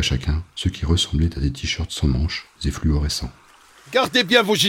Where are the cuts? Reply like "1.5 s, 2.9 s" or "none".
2.6 s